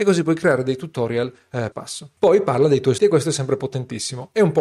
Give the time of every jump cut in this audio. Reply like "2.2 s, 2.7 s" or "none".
1.7 s, 2.2 s, 3.0 s